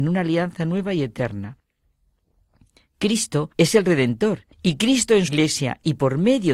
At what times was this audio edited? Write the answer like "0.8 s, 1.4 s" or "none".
3.5 s, 4.5 s, 5.3 s

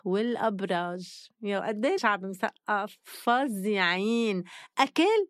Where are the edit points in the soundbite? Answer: 1.6 s, 2.0 s

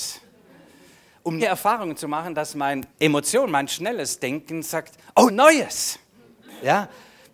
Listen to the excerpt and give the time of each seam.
1.4 s, 2.9 s, 5.3 s

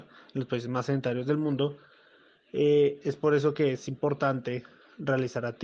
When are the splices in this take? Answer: none

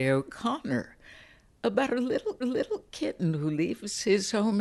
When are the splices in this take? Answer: 2.4 s

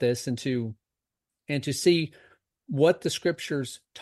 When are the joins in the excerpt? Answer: none

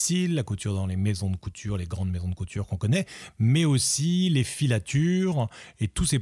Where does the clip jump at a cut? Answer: none

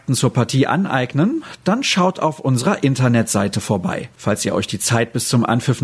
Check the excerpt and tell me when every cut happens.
4.1 s

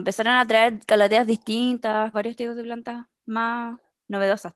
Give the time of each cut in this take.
2.1 s

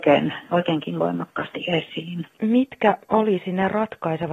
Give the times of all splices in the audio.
2.3 s

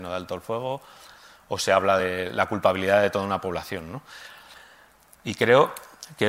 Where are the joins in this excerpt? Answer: none

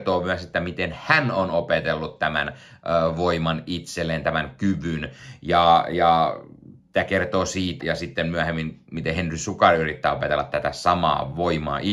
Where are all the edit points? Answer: 7.8 s

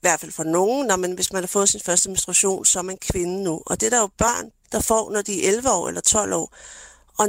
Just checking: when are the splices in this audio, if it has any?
4.6 s

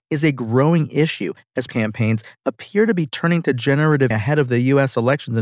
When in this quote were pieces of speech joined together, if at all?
1.7 s, 4.1 s

